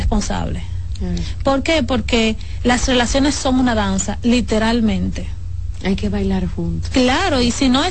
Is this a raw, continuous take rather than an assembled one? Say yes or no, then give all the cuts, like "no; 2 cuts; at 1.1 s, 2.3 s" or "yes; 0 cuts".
yes; 0 cuts